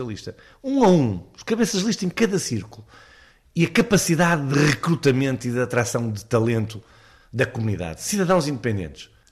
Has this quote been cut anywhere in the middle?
no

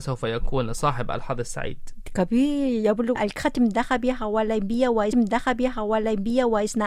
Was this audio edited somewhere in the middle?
yes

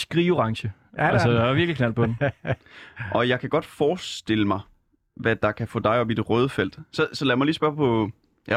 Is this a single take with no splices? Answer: yes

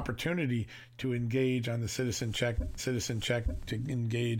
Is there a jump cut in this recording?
yes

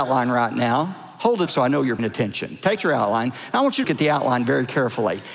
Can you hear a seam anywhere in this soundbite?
yes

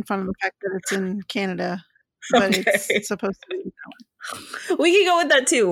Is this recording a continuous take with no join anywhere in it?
yes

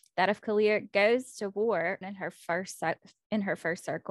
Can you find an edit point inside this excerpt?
yes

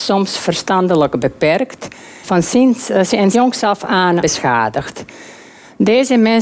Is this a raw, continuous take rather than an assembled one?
no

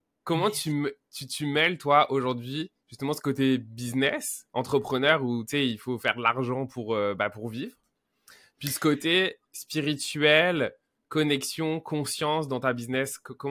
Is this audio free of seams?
yes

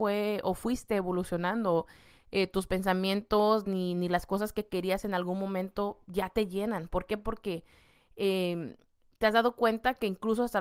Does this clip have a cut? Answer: no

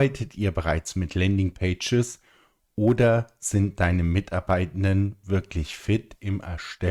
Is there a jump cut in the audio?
no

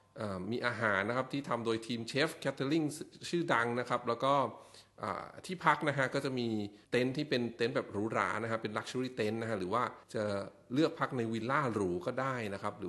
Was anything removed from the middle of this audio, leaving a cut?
yes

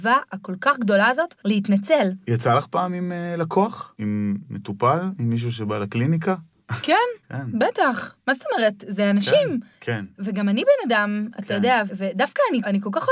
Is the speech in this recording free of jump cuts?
yes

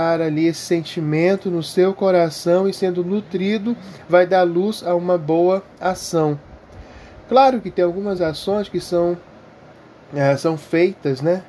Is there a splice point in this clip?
no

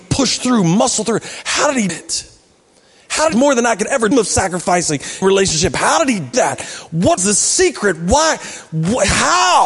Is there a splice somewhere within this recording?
yes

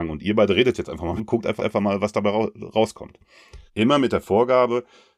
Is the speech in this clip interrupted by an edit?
yes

